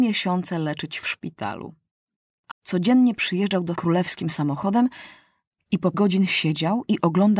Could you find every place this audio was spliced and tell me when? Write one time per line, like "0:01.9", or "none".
0:02.5
0:03.7
0:05.9